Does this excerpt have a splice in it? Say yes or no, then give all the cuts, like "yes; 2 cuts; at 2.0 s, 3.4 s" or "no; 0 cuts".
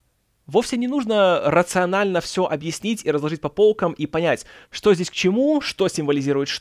no; 0 cuts